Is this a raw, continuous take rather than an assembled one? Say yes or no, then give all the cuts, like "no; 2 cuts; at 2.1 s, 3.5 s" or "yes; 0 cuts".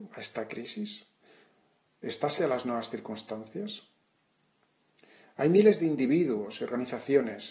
no; 1 cut; at 2.4 s